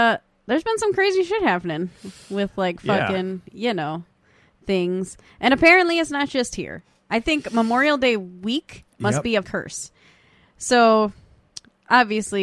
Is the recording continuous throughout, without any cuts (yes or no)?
no